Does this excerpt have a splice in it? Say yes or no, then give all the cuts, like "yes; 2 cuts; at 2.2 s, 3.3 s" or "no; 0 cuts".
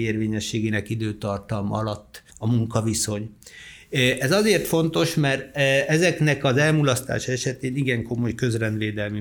yes; 1 cut; at 2.3 s